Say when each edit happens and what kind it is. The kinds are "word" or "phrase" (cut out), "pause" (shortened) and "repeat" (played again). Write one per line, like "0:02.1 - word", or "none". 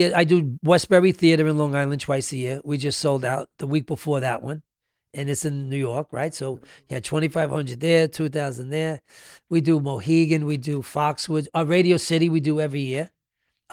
none